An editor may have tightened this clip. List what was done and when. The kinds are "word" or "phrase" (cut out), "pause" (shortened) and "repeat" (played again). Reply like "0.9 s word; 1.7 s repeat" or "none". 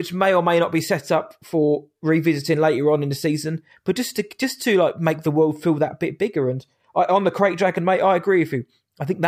none